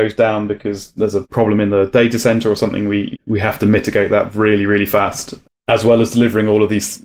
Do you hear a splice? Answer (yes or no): no